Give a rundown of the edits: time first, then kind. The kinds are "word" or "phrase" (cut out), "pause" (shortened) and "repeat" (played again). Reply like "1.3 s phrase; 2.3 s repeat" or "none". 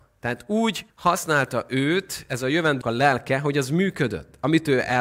0.9 s pause; 2.8 s word